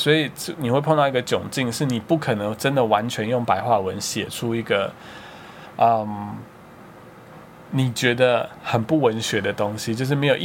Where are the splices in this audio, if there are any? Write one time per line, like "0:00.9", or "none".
none